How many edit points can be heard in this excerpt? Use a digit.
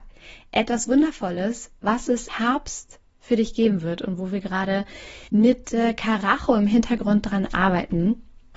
2